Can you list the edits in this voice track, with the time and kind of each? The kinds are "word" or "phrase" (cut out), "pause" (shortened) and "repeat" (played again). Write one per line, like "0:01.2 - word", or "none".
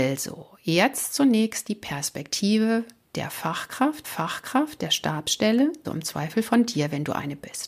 0:04.0 - repeat
0:05.8 - word